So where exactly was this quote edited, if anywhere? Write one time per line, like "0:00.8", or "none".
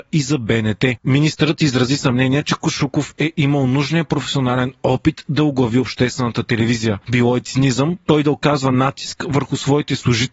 none